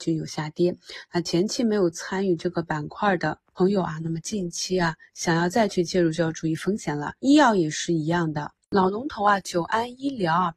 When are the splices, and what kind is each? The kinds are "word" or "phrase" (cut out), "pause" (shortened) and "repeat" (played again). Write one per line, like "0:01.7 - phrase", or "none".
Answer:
0:07.2 - pause